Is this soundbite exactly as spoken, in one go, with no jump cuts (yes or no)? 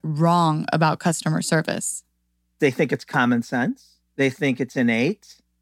yes